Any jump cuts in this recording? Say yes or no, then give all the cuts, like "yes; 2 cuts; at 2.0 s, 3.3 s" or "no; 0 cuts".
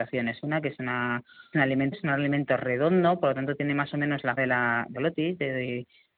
yes; 4 cuts; at 1.5 s, 1.9 s, 4.4 s, 4.9 s